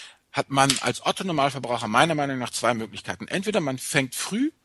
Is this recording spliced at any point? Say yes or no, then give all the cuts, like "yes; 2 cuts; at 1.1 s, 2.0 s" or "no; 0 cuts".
no; 0 cuts